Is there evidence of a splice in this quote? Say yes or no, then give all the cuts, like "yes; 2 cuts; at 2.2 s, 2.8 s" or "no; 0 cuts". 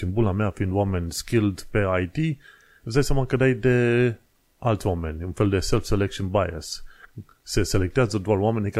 no; 0 cuts